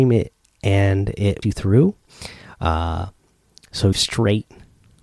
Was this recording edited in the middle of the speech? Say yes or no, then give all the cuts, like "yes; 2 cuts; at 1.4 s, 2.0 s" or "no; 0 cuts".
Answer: yes; 2 cuts; at 1.4 s, 3.9 s